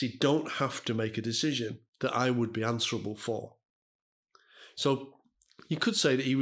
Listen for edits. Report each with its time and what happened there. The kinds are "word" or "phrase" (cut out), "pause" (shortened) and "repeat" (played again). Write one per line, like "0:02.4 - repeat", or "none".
0:01.9 - pause